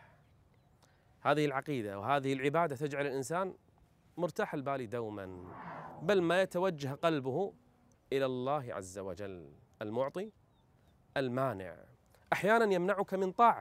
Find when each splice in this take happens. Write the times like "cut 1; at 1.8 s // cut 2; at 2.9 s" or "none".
cut 1; at 7.9 s // cut 2; at 9.7 s